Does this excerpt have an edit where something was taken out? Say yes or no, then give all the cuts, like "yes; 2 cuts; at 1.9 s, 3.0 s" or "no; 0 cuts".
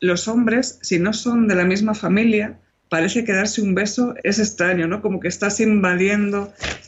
yes; 2 cuts; at 2.7 s, 4.2 s